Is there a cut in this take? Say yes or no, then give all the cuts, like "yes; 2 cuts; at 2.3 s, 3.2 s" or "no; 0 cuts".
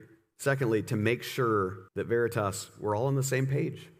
yes; 1 cut; at 1.9 s